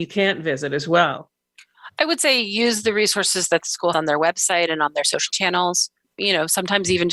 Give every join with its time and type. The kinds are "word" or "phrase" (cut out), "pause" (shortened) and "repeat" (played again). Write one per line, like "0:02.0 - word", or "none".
0:03.9 - word
0:05.3 - word
0:06.0 - word